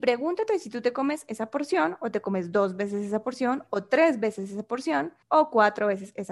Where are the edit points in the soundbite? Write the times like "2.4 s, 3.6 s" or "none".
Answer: 5.2 s

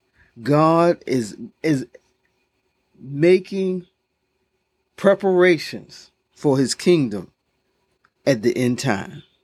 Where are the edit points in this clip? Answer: 1.5 s

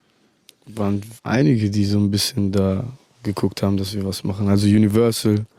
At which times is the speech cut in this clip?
1.2 s

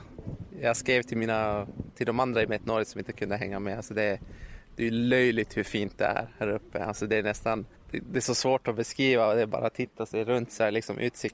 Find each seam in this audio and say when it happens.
7.8 s

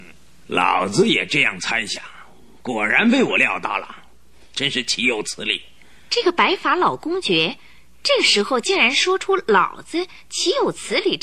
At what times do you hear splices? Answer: 4.5 s, 6.0 s

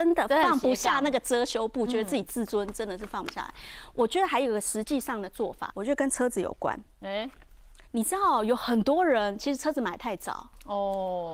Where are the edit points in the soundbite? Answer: 5.7 s

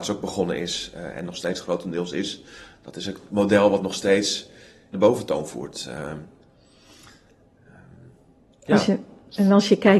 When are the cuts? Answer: 4.9 s

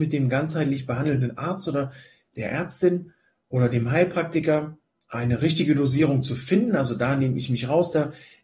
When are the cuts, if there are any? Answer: none

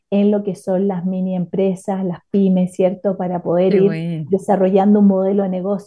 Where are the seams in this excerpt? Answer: none

